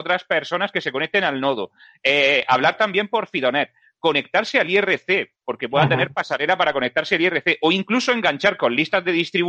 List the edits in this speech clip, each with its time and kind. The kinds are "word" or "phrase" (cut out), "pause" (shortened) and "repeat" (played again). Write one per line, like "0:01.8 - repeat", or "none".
none